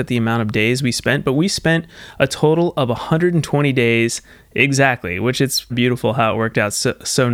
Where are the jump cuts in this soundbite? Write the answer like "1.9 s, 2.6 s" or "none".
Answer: 5.7 s